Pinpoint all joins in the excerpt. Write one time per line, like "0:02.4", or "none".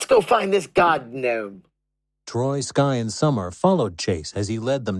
none